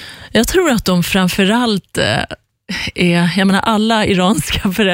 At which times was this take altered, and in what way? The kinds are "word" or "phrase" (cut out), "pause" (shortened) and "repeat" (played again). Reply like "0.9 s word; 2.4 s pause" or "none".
none